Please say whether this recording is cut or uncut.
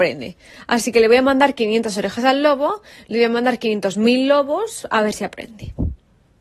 uncut